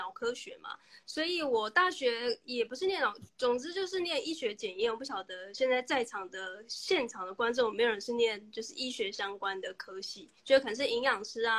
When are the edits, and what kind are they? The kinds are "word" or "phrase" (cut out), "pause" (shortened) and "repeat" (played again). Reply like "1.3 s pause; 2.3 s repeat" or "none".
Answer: 10.4 s pause